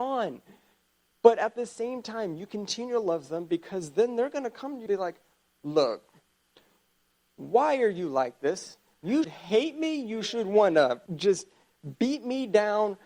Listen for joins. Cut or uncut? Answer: cut